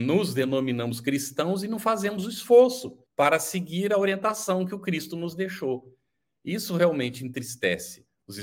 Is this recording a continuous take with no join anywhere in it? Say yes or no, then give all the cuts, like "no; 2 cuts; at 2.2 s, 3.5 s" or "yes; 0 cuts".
no; 1 cut; at 3.1 s